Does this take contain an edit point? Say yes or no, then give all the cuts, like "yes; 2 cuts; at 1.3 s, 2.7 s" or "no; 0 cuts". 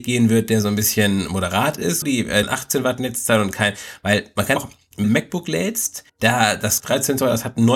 yes; 6 cuts; at 2.0 s, 2.4 s, 4.6 s, 5.0 s, 6.1 s, 6.8 s